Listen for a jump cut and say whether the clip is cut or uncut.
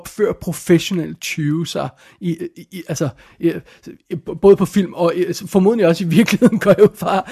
uncut